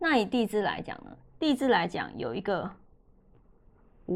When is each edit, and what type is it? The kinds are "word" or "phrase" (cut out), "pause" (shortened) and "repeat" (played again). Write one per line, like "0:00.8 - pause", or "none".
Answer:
none